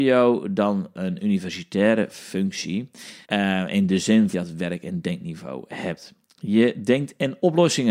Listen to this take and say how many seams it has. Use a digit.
4